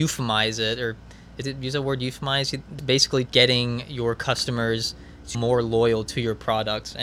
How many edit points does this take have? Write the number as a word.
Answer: four